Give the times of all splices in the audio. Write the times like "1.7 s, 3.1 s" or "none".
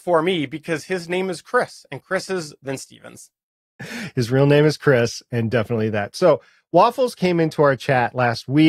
2.6 s

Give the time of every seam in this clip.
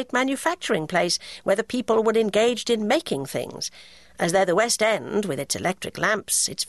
none

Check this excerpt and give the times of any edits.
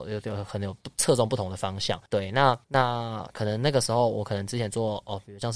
2.1 s, 2.6 s

